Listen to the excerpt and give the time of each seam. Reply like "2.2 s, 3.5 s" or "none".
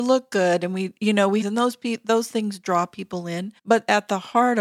1.4 s, 3.6 s